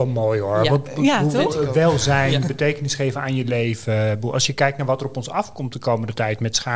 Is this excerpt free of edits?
yes; 0 cuts

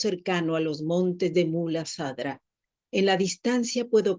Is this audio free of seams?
yes; 0 cuts

